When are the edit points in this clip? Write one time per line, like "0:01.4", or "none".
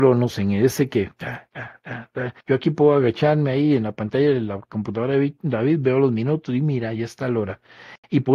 0:02.4